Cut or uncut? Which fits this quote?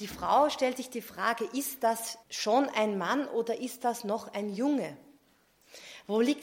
cut